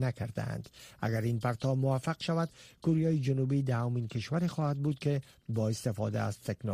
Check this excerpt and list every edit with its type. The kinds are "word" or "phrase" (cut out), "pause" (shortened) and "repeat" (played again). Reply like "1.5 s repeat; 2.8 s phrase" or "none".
none